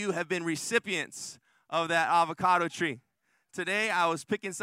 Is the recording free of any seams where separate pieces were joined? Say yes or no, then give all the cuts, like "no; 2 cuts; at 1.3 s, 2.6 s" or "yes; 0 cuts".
yes; 0 cuts